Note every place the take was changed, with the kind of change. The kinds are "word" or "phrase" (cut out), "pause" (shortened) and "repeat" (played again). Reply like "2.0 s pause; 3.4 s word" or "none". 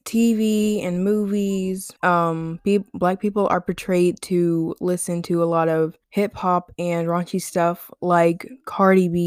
2.0 s pause; 6.0 s pause